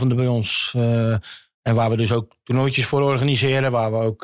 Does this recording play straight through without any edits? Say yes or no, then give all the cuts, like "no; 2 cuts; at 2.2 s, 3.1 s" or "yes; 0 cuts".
yes; 0 cuts